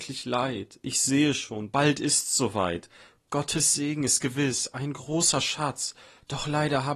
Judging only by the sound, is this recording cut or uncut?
uncut